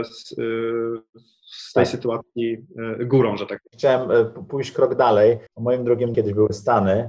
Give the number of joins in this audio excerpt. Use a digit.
2